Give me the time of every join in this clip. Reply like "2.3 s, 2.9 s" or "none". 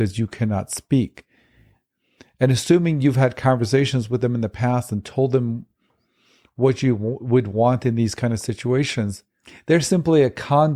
none